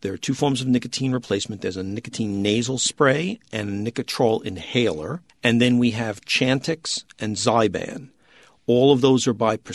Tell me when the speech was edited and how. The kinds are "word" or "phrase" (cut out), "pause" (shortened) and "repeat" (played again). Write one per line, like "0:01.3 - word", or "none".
0:05.3 - pause